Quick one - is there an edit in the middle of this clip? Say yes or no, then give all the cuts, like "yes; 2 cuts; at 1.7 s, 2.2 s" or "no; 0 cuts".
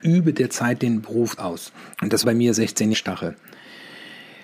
yes; 4 cuts; at 1.4 s, 1.9 s, 2.2 s, 2.9 s